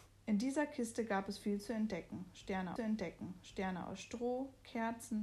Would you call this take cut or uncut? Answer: cut